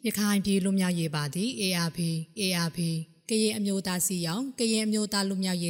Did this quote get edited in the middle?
yes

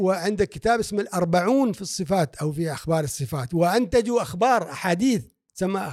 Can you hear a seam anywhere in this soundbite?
no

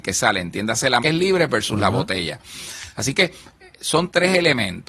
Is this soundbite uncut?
no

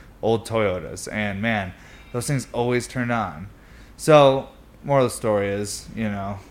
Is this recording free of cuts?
yes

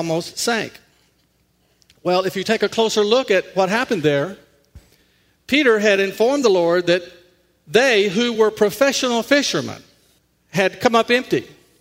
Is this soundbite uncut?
yes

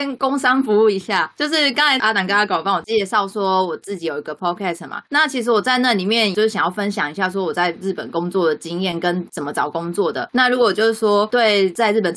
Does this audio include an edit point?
no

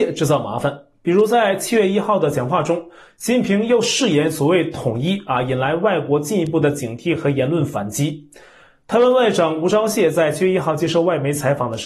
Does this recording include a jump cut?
no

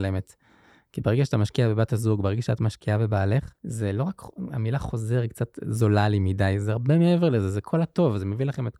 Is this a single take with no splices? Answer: no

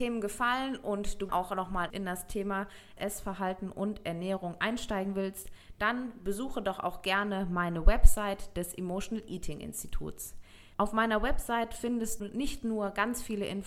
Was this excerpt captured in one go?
no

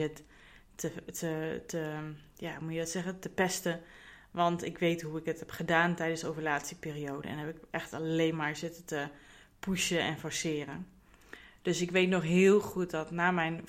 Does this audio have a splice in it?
no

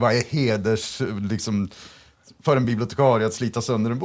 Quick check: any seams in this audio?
no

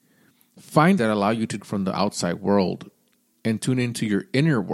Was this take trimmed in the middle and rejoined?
yes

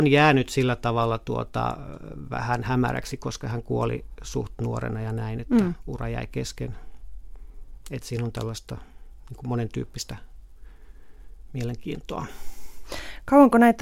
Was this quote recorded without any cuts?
yes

